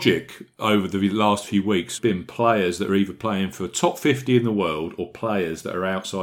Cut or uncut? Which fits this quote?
cut